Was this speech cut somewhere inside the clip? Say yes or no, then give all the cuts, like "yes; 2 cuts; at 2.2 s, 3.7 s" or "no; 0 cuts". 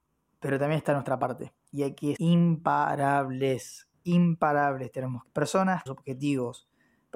yes; 4 cuts; at 1.6 s, 2.2 s, 5.3 s, 5.9 s